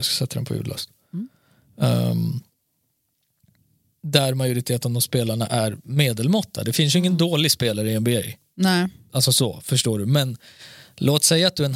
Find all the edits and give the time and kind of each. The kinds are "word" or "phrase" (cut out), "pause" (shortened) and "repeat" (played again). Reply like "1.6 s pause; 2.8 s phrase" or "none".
none